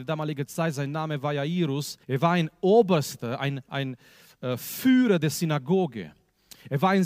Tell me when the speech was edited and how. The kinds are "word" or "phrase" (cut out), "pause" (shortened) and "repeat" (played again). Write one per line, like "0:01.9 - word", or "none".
0:02.0 - pause